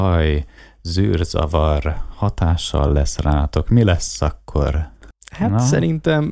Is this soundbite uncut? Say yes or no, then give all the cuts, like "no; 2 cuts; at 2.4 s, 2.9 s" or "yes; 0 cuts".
yes; 0 cuts